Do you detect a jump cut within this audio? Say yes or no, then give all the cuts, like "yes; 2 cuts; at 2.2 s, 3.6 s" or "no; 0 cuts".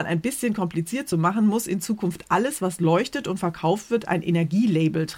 no; 0 cuts